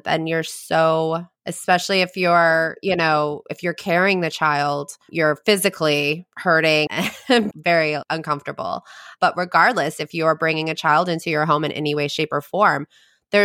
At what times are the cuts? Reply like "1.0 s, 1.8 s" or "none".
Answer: 6.9 s, 7.5 s